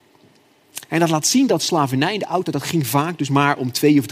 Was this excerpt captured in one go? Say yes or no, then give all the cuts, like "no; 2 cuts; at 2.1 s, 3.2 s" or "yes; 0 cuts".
yes; 0 cuts